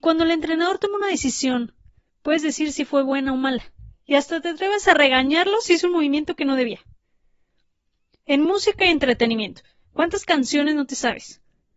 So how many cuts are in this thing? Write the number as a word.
zero